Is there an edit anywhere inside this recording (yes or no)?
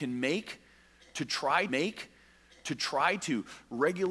yes